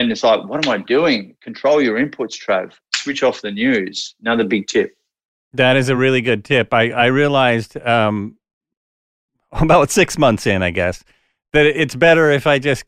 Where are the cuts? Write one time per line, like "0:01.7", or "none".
none